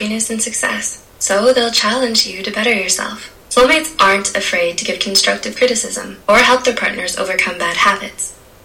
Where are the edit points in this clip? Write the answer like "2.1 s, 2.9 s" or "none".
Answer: 1.1 s, 3.4 s, 6.2 s